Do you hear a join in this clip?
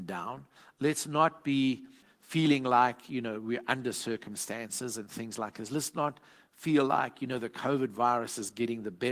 no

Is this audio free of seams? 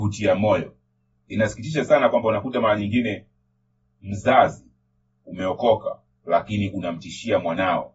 yes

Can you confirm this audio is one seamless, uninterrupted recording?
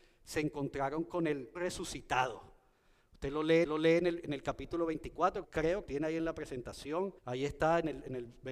no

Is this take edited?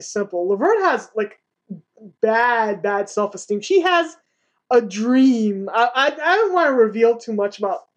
no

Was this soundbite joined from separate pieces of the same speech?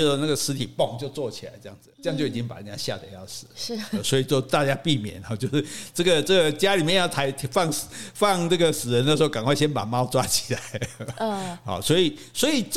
yes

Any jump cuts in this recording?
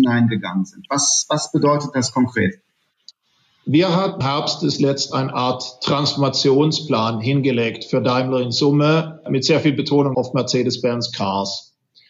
yes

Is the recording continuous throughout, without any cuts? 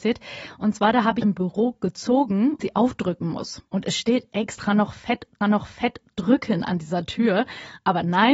no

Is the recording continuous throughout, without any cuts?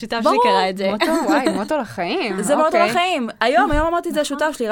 yes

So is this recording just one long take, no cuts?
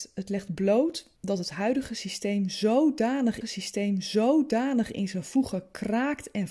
no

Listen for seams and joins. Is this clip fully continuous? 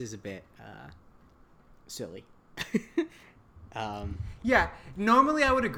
yes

